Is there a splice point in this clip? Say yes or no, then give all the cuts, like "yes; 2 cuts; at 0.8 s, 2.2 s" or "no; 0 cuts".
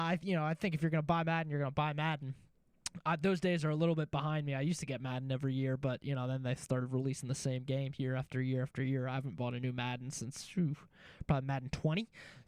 no; 0 cuts